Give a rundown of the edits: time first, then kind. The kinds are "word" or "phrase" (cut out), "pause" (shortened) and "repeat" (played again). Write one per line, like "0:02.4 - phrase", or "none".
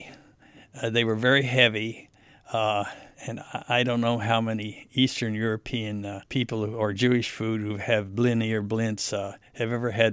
0:03.1 - pause
0:06.3 - pause